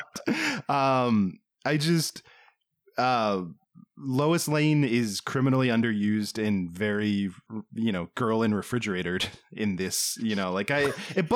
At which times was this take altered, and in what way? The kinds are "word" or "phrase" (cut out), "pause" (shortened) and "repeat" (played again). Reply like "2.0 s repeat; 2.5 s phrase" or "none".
7.5 s word